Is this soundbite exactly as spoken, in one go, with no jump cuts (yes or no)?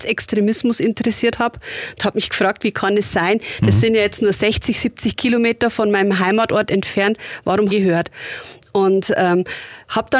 no